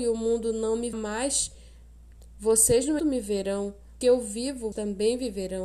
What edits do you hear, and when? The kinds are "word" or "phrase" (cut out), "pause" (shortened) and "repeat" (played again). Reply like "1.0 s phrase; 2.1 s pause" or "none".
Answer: 0.9 s word; 3.0 s word; 4.0 s word; 4.7 s word

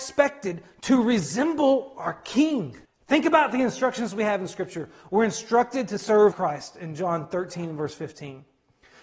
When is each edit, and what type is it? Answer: 2.8 s pause; 6.3 s word

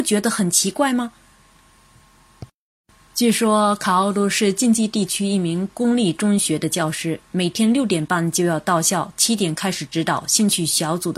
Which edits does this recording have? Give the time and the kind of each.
2.9 s pause

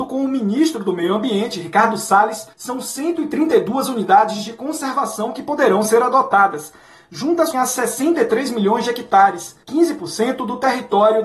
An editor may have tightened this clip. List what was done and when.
2.5 s pause; 7.5 s word; 9.6 s pause

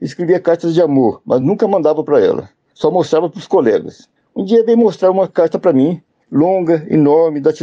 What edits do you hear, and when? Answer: none

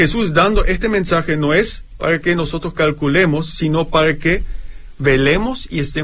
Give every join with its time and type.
none

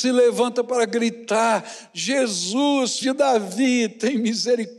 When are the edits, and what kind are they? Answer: 3.0 s word

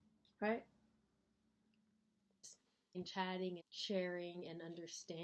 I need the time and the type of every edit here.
2.9 s word; 3.6 s word

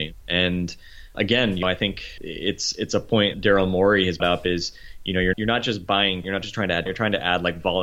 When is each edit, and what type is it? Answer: 1.1 s word; 1.6 s word; 2.2 s word; 3.3 s word; 4.2 s word; 5.3 s word; 6.2 s word; 6.9 s word

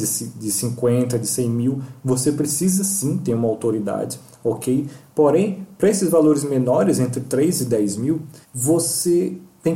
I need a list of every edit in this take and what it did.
8.4 s pause

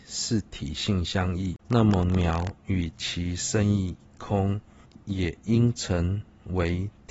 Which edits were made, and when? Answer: 1.6 s pause; 4.8 s pause

